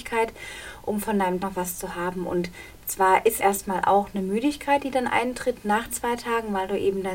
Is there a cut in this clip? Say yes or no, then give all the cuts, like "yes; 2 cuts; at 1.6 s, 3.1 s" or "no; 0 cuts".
yes; 3 cuts; at 1.4 s, 3.4 s, 5.9 s